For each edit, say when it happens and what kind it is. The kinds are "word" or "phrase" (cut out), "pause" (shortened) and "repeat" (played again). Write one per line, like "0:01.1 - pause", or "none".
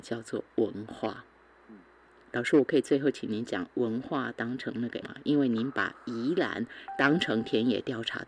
0:05.0 - word